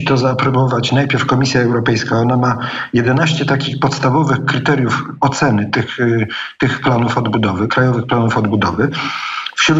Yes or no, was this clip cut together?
no